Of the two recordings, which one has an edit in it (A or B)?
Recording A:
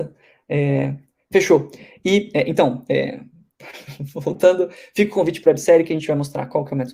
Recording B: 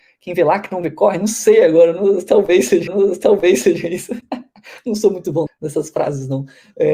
B